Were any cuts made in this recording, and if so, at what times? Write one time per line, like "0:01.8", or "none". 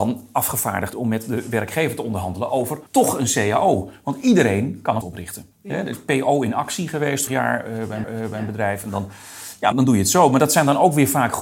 0:00.9
0:02.9
0:05.0
0:05.5
0:07.3
0:08.0
0:09.7

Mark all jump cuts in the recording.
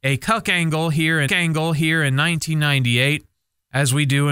0:01.3

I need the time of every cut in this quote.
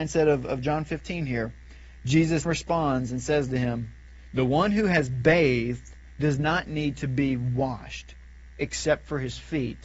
0:02.5

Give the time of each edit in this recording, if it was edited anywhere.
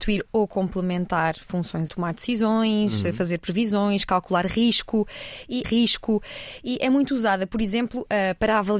0:01.9
0:05.6

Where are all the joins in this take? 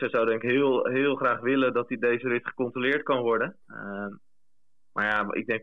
0:03.6

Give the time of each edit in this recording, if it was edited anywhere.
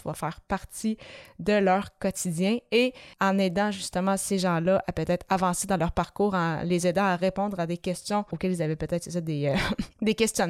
0:03.1
0:08.3

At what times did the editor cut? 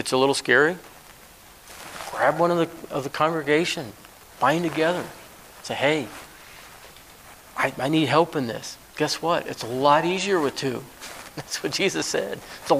none

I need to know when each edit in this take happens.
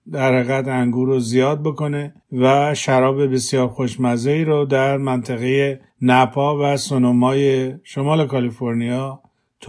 0:02.2
0:05.9

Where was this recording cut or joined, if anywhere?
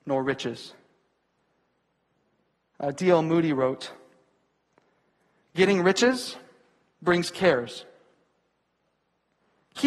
none

